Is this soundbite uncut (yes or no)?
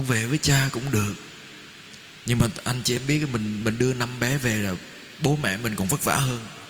yes